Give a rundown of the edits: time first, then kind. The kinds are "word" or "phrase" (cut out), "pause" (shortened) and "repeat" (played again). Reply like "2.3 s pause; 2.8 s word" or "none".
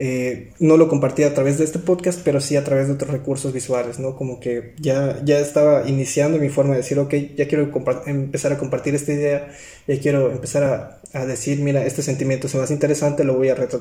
none